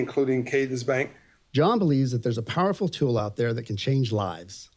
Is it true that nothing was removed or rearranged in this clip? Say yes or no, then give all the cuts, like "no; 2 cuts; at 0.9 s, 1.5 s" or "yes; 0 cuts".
yes; 0 cuts